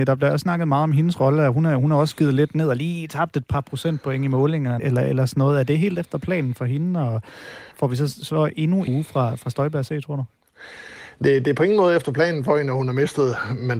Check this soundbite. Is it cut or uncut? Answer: cut